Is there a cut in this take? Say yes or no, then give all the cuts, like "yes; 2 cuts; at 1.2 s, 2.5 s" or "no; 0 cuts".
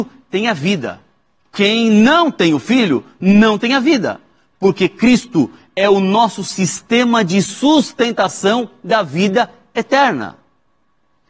no; 0 cuts